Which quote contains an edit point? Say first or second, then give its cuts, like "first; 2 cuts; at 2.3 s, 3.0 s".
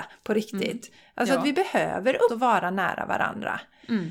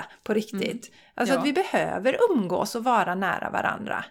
first; 1 cut; at 2.3 s